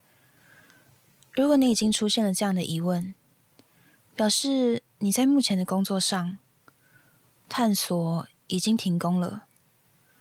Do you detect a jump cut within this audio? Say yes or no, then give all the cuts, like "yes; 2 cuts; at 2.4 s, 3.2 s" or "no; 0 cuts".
no; 0 cuts